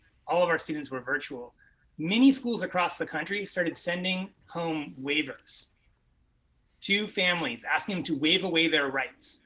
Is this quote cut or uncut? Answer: uncut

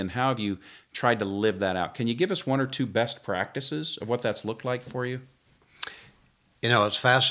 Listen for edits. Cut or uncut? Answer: uncut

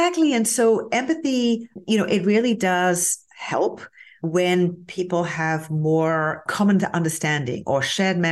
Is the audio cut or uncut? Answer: uncut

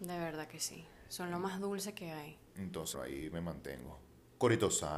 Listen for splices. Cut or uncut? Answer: cut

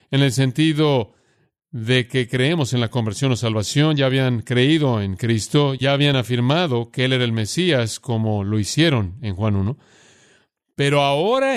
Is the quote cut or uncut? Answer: uncut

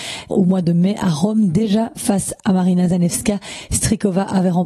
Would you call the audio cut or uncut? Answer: uncut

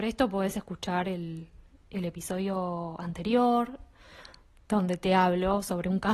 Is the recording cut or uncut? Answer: uncut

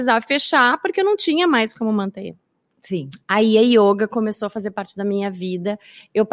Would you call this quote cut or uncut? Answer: uncut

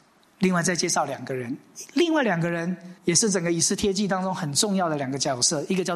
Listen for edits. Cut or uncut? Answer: cut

